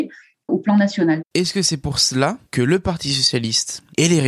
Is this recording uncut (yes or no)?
no